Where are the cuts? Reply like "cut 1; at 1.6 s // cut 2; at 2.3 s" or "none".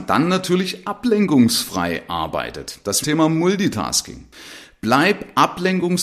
cut 1; at 3.0 s